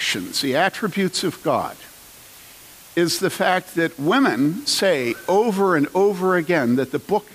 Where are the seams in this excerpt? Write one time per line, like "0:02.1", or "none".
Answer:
none